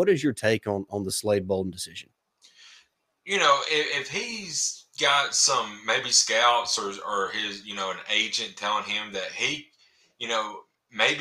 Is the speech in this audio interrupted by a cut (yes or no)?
no